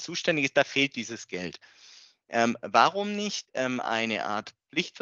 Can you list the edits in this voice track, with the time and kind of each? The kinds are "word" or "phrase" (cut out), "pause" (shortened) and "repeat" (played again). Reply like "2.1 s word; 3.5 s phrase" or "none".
none